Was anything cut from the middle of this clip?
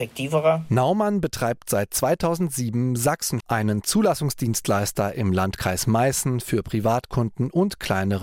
yes; 1 cut; at 3.4 s

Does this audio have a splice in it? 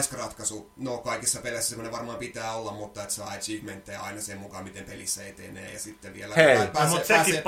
no; 0 cuts

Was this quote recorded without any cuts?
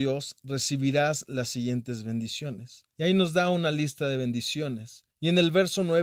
no; 2 cuts; at 2.9 s, 5.1 s

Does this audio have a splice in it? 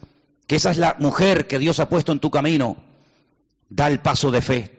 no; 0 cuts

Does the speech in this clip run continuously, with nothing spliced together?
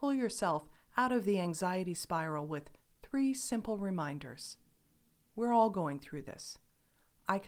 yes; 0 cuts

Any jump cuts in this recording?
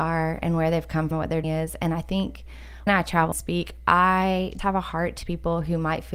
yes; 6 cuts; at 1.1 s, 1.4 s, 2.9 s, 3.3 s, 4.6 s, 5.2 s

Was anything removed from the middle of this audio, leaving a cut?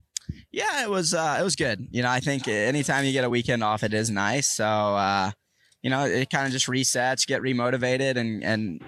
no; 0 cuts

